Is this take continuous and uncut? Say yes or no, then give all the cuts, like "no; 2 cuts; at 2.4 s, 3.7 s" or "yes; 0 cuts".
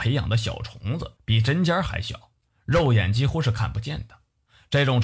no; 1 cut; at 1.2 s